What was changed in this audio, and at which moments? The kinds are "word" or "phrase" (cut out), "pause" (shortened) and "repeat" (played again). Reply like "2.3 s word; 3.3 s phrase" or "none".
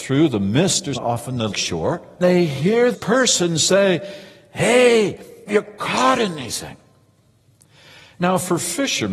0.9 s word; 1.5 s word; 2.2 s word; 2.9 s word; 5.5 s word